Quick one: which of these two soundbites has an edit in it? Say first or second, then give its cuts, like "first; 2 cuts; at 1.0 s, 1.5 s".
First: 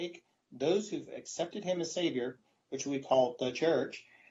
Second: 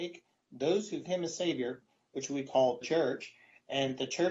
second; 2 cuts; at 1.1 s, 2.8 s